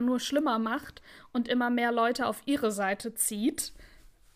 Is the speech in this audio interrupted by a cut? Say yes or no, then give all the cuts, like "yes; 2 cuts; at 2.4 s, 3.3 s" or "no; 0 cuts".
no; 0 cuts